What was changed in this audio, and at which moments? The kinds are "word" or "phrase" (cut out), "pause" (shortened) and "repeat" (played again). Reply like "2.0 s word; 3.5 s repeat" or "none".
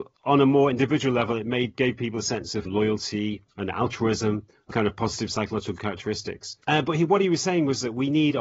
1.8 s word; 2.7 s phrase; 3.5 s pause; 4.7 s word; 6.6 s pause